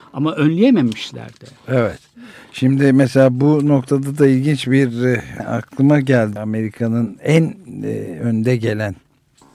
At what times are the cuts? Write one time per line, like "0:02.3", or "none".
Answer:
0:01.6
0:05.4
0:06.4